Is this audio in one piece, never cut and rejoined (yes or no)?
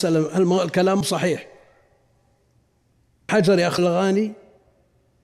no